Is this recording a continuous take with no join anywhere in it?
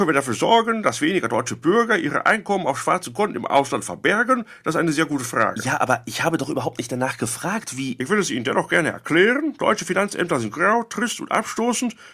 yes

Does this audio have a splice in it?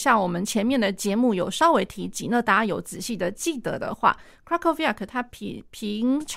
no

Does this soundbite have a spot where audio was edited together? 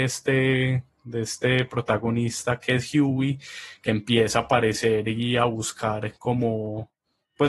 yes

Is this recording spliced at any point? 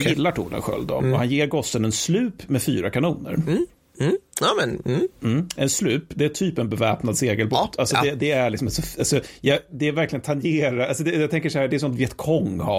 no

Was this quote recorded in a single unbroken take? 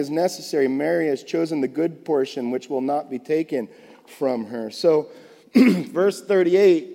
yes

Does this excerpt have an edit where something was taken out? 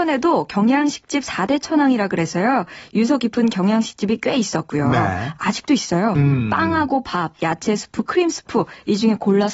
no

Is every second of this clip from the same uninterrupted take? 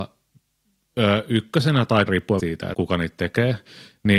no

